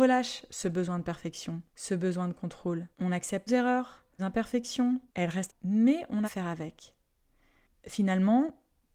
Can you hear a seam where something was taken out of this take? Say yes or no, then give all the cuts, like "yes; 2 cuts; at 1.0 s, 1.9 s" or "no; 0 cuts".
yes; 7 cuts; at 1.7 s, 2.9 s, 3.5 s, 4.2 s, 5.1 s, 5.5 s, 6.2 s